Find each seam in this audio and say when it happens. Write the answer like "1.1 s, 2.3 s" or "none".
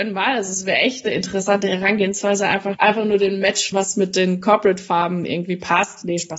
2.7 s, 3.7 s